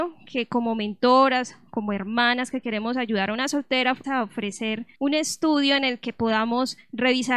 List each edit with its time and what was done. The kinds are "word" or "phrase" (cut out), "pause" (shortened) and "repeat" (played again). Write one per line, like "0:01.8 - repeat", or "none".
0:04.0 - word
0:04.9 - pause